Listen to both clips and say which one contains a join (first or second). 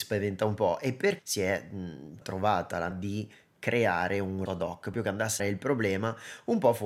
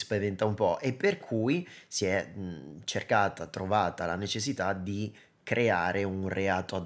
first